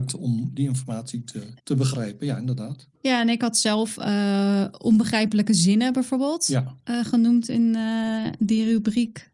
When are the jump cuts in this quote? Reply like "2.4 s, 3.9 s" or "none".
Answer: 1.6 s, 3.0 s